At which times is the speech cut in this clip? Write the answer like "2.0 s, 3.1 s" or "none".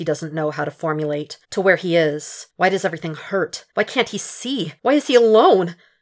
1.4 s, 2.5 s, 3.7 s, 4.8 s